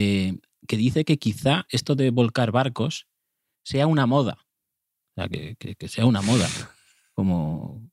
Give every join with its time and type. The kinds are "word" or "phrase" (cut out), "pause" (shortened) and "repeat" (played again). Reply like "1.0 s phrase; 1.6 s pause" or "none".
none